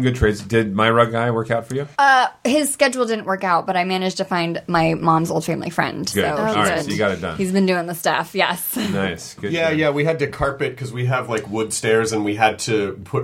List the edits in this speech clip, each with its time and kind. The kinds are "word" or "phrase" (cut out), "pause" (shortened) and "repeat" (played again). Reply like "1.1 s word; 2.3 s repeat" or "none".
1.9 s pause